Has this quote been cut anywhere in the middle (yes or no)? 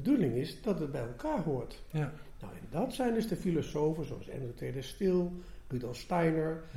no